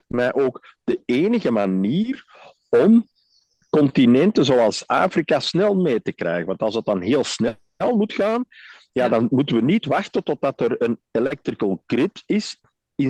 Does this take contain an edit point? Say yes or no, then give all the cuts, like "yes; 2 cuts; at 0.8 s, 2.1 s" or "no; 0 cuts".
no; 0 cuts